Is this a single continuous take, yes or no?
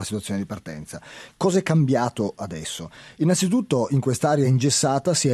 yes